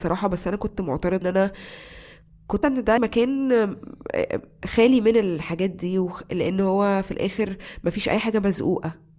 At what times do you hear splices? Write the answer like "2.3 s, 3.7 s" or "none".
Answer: 1.2 s, 2.6 s, 3.0 s